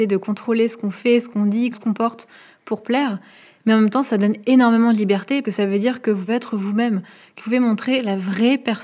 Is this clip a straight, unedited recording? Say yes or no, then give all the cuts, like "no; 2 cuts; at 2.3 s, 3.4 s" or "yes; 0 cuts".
no; 4 cuts; at 1.7 s, 5.4 s, 6.3 s, 7.4 s